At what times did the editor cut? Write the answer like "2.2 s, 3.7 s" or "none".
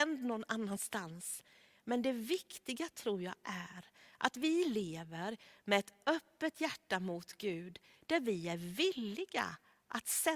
none